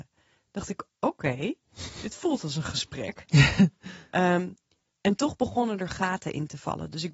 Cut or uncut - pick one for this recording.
uncut